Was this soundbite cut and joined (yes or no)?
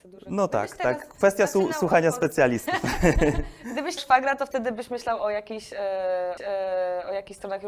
yes